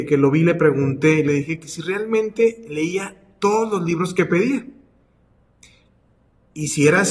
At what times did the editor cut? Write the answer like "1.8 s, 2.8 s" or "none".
none